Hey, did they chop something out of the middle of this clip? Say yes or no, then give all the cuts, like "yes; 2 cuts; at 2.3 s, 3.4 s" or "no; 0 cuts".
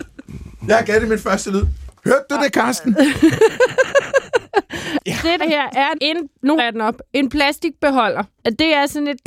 yes; 3 cuts; at 5.4 s, 5.9 s, 6.6 s